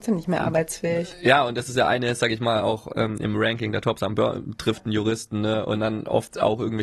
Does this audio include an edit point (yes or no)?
no